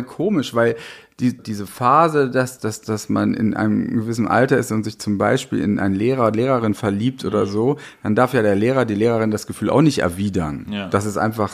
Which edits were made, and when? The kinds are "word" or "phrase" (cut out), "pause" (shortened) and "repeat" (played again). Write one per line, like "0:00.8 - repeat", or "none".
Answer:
0:01.4 - word
0:02.6 - word